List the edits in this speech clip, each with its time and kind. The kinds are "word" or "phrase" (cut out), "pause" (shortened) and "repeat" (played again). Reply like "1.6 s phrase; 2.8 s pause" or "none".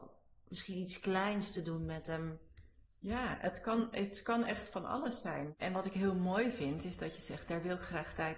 none